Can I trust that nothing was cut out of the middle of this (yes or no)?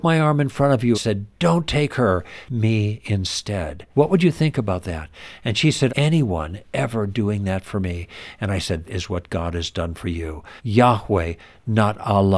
no